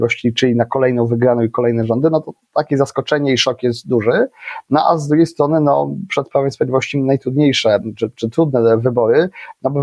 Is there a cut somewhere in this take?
no; 0 cuts

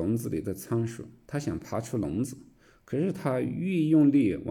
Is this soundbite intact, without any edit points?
yes; 0 cuts

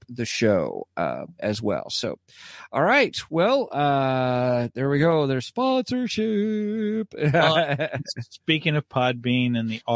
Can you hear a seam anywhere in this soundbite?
no; 0 cuts

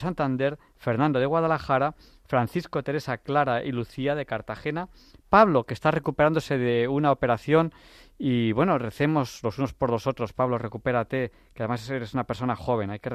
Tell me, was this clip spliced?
no; 0 cuts

